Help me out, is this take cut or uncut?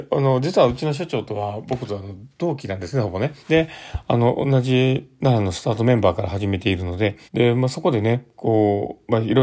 cut